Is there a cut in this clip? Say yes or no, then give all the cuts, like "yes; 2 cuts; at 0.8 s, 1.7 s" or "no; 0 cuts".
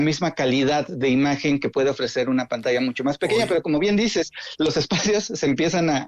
no; 0 cuts